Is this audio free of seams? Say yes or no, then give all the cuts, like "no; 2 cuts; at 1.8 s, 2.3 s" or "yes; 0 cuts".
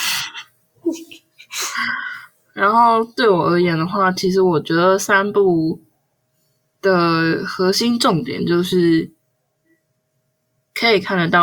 yes; 0 cuts